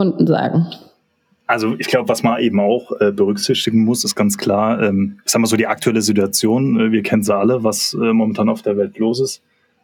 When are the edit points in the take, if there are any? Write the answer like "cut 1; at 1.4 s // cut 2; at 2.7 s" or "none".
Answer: none